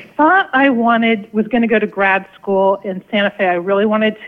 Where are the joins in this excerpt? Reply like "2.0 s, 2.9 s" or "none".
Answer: none